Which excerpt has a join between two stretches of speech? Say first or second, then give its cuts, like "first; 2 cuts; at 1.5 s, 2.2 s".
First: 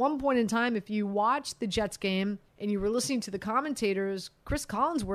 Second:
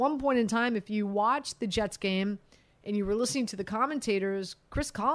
first; 1 cut; at 2.5 s